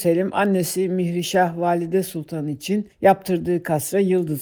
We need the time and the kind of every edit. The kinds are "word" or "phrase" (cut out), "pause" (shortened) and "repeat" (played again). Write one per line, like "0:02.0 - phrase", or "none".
0:02.9 - pause